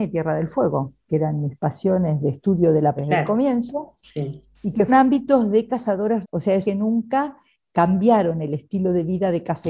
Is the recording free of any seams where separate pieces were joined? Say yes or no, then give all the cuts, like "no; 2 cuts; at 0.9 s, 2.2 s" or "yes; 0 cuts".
no; 5 cuts; at 2.2 s, 3.0 s, 4.9 s, 6.2 s, 6.6 s